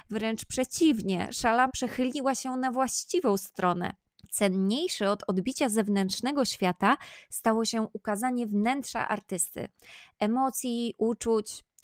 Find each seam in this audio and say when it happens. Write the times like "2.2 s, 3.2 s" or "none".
1.7 s, 4.2 s